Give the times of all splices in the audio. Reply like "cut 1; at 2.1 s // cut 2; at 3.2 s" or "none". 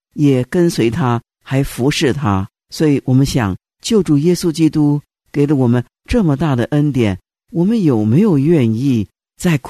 none